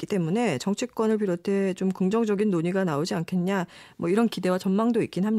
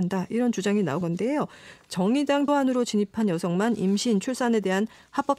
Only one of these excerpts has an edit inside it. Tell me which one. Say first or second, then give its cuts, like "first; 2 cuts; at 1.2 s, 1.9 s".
second; 2 cuts; at 1.0 s, 2.5 s